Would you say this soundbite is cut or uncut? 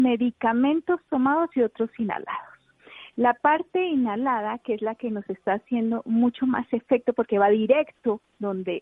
uncut